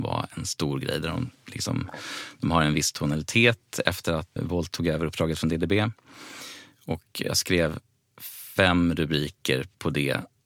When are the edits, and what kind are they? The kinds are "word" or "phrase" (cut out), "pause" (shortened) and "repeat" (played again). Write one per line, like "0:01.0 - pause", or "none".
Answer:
0:04.4 - word